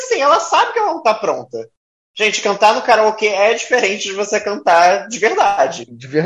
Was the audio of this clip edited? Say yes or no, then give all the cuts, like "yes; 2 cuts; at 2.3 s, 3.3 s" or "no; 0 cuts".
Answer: no; 0 cuts